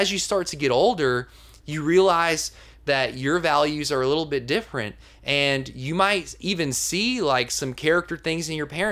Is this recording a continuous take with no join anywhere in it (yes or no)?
yes